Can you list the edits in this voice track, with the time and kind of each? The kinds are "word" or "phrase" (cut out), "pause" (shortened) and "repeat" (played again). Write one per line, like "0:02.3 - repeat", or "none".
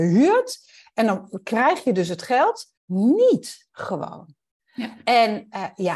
0:02.8 - pause